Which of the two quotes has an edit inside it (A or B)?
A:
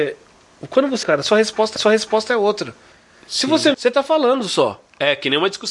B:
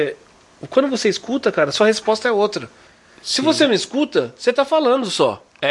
A